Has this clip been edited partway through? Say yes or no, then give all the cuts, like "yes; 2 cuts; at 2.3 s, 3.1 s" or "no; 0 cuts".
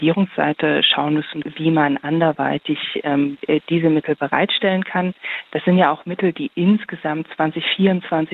no; 0 cuts